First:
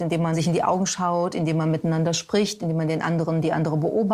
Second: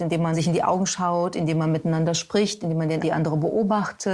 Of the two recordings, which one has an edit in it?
second; 1 cut; at 3.0 s

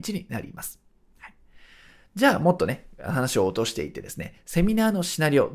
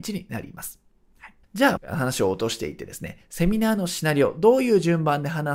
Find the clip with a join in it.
second; 2 cuts; at 1.4 s, 1.8 s

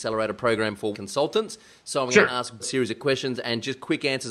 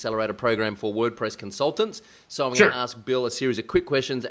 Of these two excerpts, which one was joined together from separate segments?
first; 3 cuts; at 0.9 s, 2.6 s, 3.0 s

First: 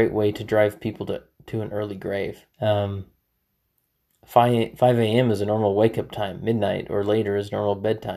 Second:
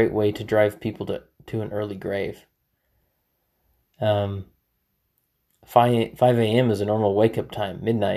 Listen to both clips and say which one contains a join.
first; 1 cut; at 2.5 s

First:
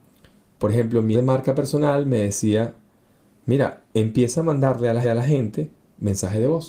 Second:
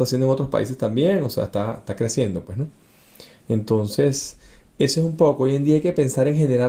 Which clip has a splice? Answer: first; 3 cuts; at 1.1 s, 3.9 s, 5.0 s

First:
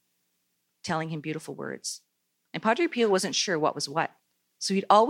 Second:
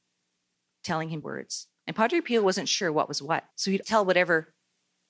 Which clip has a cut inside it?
second; 4 cuts; at 1.2 s, 1.8 s, 3.5 s, 3.8 s

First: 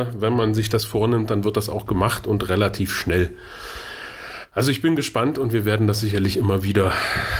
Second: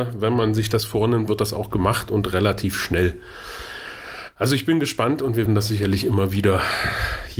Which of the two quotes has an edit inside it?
second; 2 cuts; at 1.3 s, 5.5 s

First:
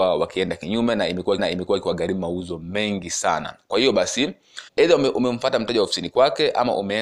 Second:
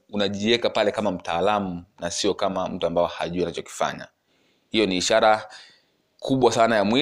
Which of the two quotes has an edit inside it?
first; 2 cuts; at 1.4 s, 4.7 s

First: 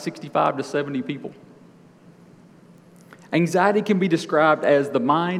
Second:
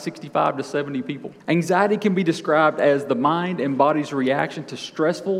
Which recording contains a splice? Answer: second; 1 cut; at 1.4 s

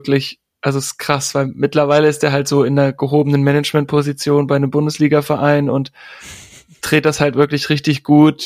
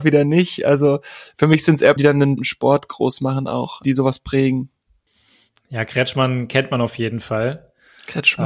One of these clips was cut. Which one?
second; 3 cuts; at 2.0 s, 2.4 s, 3.8 s

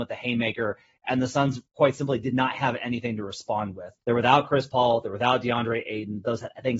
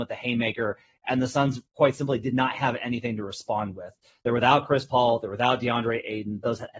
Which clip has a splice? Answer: first; 1 cut; at 4.0 s

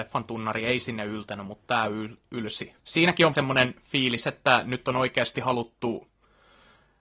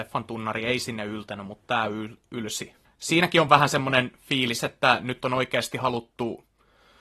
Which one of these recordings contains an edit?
first; 2 cuts; at 2.8 s, 3.3 s

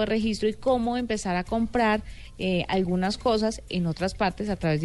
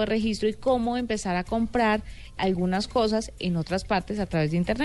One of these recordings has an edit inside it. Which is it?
second; 1 cut; at 2.4 s

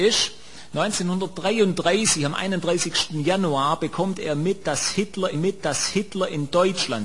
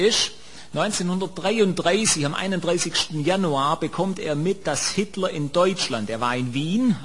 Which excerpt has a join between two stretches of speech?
first; 1 cut; at 5.3 s

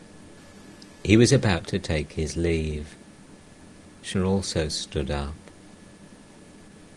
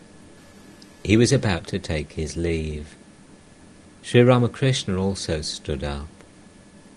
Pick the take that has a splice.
first; 1 cut; at 4.1 s

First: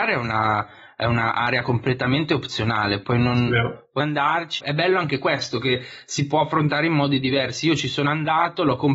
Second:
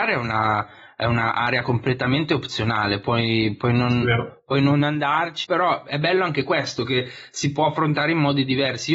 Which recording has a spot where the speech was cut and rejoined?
first; 3 cuts; at 3.0 s, 4.0 s, 4.6 s

